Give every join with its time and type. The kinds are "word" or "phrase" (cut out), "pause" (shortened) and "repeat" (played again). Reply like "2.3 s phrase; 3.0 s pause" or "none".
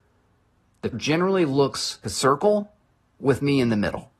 0.9 s word; 2.0 s word